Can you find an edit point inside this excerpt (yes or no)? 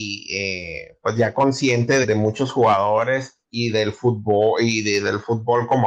yes